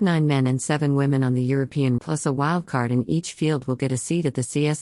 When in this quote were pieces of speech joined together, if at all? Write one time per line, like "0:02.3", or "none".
0:02.0

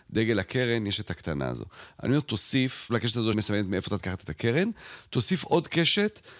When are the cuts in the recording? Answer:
0:01.0
0:02.9
0:03.3
0:04.0

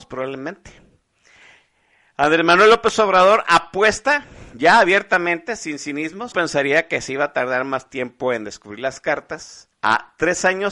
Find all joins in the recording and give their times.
0:06.3
0:09.7

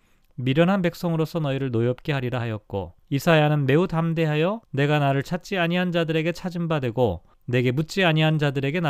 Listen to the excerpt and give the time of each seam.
0:03.0
0:04.6
0:07.3

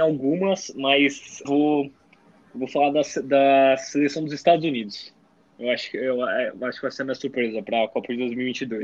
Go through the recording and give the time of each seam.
0:01.4

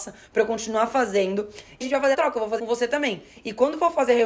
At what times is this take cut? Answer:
0:01.8
0:02.1
0:02.6

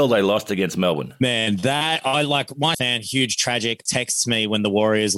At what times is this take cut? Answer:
0:02.7
0:03.9

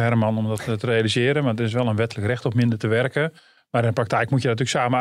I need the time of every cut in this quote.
none

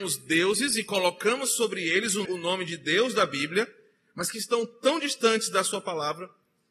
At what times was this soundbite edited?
0:02.2

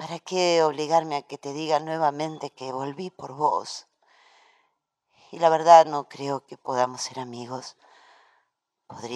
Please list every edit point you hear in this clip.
none

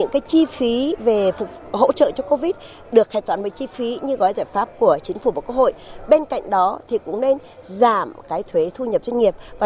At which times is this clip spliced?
none

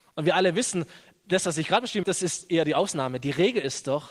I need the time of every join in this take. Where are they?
0:02.0

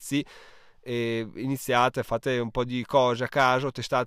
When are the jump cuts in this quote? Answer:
none

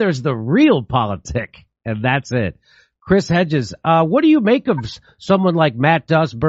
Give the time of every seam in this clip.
none

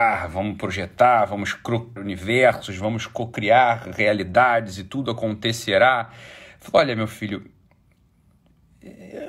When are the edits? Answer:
0:02.0

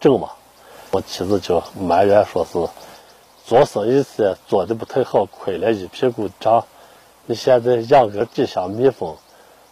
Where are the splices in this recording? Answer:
none

